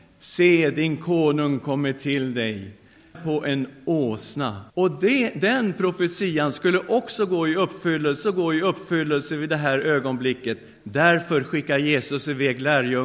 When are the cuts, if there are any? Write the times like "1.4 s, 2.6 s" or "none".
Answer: 3.1 s, 4.7 s, 8.2 s